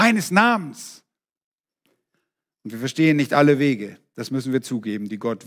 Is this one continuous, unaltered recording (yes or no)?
yes